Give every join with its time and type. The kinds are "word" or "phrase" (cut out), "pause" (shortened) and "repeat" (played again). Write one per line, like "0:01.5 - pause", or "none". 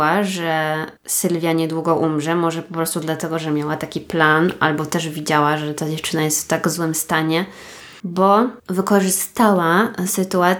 0:01.0 - pause
0:08.6 - pause